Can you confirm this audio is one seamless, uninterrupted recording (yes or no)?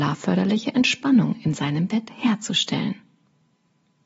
yes